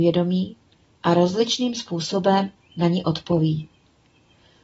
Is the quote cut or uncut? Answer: uncut